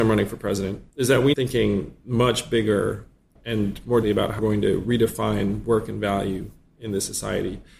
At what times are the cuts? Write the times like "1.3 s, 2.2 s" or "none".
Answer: 0.9 s, 1.3 s, 3.4 s, 4.0 s, 4.4 s